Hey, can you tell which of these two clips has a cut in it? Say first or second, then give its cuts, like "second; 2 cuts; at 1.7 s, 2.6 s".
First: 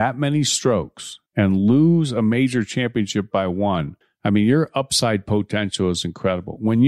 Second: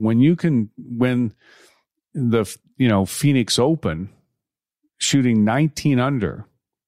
first; 2 cuts; at 1.3 s, 4.0 s